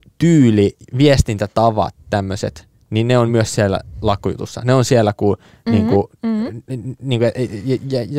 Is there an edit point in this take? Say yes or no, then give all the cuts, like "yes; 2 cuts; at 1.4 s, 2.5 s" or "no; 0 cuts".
no; 0 cuts